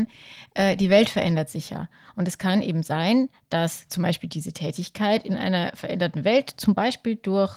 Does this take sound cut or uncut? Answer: uncut